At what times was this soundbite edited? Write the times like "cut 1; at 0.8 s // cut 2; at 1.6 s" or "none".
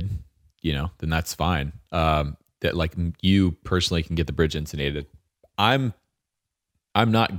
none

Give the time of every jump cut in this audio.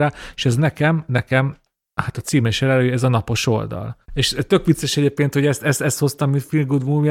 cut 1; at 4.0 s

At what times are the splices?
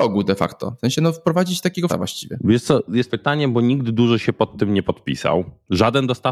cut 1; at 1.9 s // cut 2; at 3.1 s

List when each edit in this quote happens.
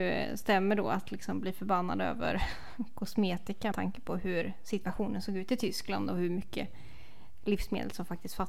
cut 1; at 3.7 s

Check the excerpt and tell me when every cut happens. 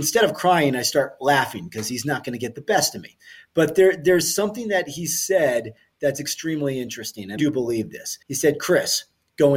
cut 1; at 7.4 s // cut 2; at 8.2 s

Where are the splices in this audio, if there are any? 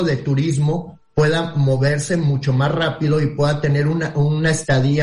none

